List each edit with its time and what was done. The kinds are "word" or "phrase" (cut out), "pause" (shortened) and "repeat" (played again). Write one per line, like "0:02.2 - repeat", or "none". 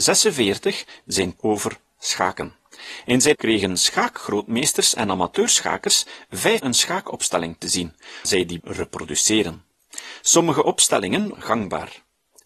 0:01.4 - word
0:03.3 - word
0:06.6 - word
0:08.2 - word
0:08.6 - word
0:11.3 - word